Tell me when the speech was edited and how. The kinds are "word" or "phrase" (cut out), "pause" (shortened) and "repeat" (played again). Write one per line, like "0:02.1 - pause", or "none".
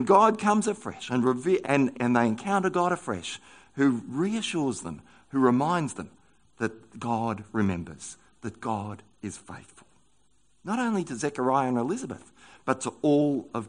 0:01.6 - word
0:01.9 - word